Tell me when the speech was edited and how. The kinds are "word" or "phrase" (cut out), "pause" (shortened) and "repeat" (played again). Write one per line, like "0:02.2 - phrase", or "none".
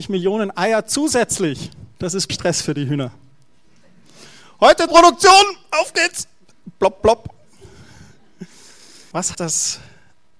0:01.9 - pause
0:02.3 - word
0:04.9 - word
0:07.0 - word
0:09.3 - word